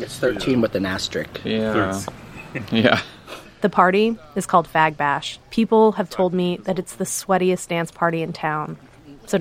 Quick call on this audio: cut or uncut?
cut